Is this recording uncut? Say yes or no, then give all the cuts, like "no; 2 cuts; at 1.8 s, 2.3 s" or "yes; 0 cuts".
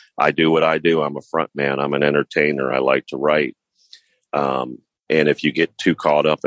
yes; 0 cuts